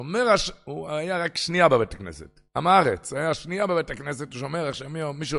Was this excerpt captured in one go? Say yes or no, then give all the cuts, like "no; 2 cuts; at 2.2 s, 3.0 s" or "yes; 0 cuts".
no; 1 cut; at 2.5 s